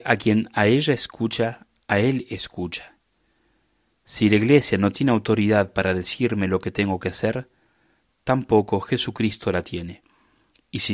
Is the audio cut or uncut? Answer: uncut